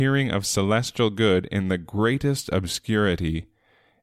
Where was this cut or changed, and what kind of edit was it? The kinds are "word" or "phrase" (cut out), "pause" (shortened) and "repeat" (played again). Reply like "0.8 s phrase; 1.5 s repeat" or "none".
none